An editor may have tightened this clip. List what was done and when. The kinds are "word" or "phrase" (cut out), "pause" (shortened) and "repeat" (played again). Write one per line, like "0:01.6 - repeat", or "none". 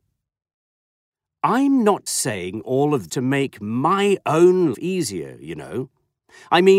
0:02.1 - word
0:03.1 - word
0:04.7 - word